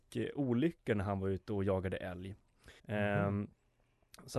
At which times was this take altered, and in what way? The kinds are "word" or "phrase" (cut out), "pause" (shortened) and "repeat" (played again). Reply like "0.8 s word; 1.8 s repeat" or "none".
2.8 s pause